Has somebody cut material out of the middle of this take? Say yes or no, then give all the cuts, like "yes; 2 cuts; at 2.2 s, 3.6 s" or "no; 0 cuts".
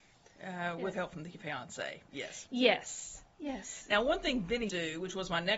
yes; 2 cuts; at 0.9 s, 4.7 s